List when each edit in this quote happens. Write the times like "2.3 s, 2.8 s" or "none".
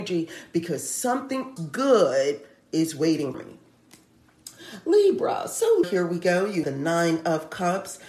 1.6 s, 3.3 s, 5.8 s, 6.6 s